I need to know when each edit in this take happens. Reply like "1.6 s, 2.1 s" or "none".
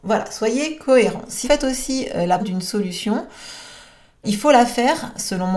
1.4 s, 2.4 s, 4.2 s